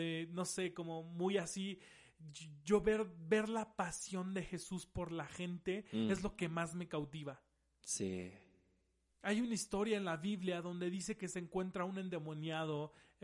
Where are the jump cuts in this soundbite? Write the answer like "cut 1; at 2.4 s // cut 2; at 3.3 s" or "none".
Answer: none